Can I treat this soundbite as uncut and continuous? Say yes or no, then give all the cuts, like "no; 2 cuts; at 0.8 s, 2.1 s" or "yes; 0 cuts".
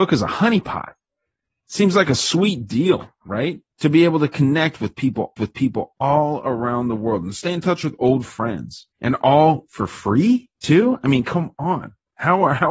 no; 4 cuts; at 1.1 s, 3.7 s, 5.4 s, 8.9 s